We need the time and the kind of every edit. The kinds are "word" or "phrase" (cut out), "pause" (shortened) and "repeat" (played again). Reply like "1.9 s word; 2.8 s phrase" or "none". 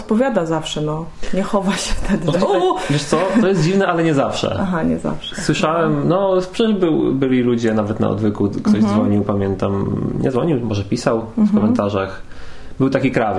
none